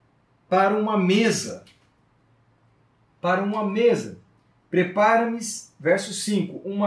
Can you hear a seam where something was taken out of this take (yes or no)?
no